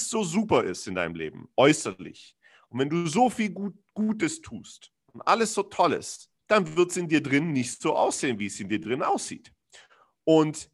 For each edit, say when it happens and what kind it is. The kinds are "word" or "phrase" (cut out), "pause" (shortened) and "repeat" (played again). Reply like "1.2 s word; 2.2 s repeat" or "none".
1.5 s pause; 6.4 s pause